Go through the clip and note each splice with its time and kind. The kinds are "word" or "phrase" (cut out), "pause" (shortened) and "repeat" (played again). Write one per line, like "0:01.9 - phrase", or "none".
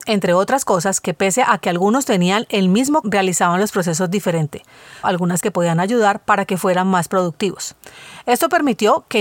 0:03.0 - word
0:05.0 - word
0:05.4 - word